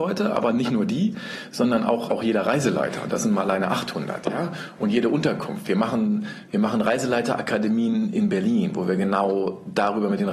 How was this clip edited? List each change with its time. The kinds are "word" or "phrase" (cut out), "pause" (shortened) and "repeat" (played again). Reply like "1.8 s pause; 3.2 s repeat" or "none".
2.1 s word